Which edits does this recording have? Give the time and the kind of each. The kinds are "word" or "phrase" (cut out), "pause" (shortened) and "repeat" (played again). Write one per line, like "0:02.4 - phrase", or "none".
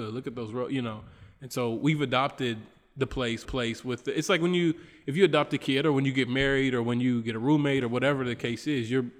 0:03.4 - repeat